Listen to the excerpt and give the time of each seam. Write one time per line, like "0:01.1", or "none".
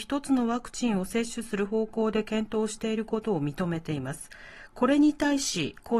none